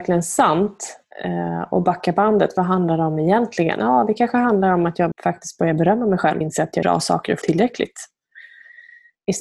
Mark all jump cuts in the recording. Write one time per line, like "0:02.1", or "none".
0:01.1
0:05.1
0:06.4
0:06.8
0:07.4